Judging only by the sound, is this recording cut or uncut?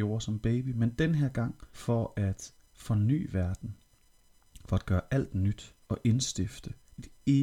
cut